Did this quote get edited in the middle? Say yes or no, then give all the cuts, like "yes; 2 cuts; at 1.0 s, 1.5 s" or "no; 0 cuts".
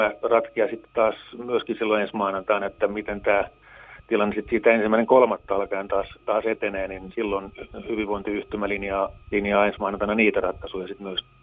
yes; 1 cut; at 9.2 s